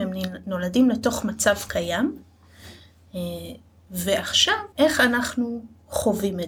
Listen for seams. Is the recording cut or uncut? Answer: cut